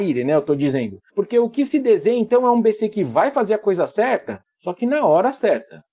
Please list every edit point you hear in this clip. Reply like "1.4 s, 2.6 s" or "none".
1.1 s

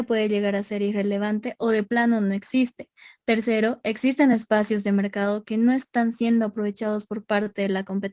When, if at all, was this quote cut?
none

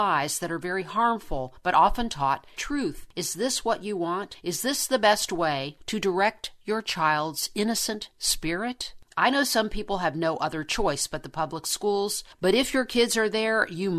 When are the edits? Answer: 2.6 s

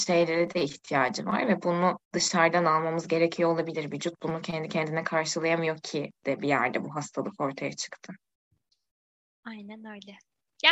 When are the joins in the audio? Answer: 2.0 s

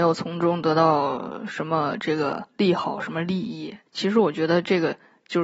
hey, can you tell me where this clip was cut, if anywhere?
2.5 s, 3.9 s

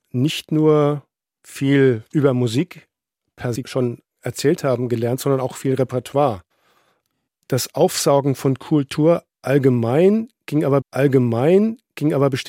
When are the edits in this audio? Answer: 3.6 s, 10.8 s

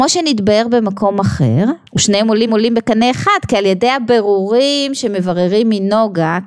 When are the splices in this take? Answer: 1.9 s, 2.5 s

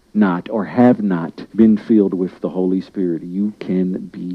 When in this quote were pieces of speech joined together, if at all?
1.5 s

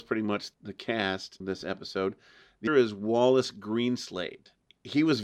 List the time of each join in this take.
1.4 s, 2.7 s

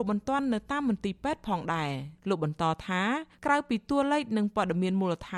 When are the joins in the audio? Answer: 2.2 s

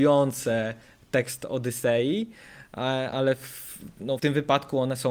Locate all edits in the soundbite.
3.1 s, 4.2 s

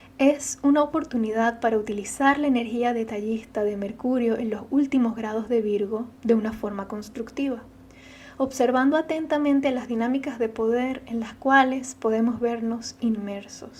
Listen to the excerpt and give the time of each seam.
none

